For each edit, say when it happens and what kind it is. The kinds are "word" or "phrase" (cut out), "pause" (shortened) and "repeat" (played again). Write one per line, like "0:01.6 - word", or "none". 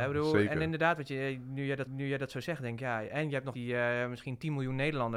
0:01.9 - repeat
0:03.5 - word